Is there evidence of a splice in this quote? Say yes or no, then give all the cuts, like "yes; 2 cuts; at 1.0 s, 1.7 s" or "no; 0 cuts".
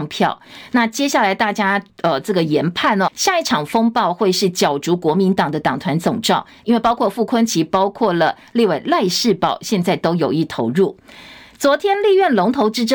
yes; 1 cut; at 3.1 s